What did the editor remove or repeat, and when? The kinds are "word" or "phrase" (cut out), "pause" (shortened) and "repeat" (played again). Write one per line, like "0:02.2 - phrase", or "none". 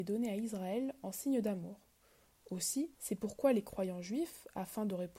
0:02.9 - pause